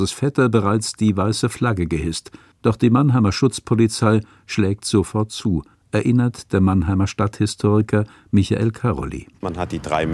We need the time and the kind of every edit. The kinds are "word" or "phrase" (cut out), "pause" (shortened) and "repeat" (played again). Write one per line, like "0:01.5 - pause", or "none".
none